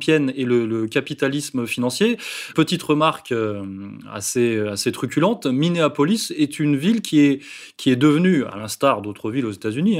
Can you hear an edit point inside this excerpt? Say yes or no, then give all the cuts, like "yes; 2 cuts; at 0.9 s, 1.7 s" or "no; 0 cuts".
no; 0 cuts